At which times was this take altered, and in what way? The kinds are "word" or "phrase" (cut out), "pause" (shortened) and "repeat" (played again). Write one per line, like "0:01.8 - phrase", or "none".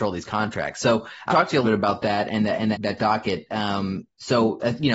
0:01.3 - word
0:01.6 - word
0:02.7 - word